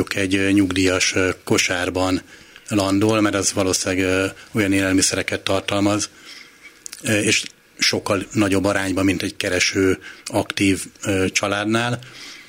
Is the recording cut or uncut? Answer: uncut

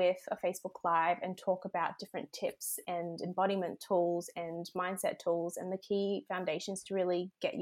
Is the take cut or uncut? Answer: uncut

